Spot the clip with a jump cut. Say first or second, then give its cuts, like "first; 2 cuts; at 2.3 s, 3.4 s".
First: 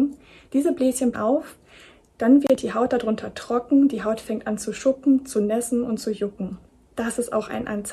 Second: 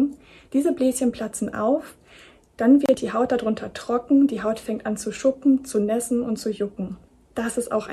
first; 1 cut; at 1.1 s